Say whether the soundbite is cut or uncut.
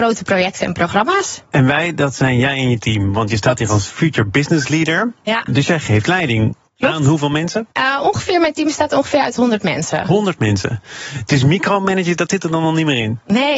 cut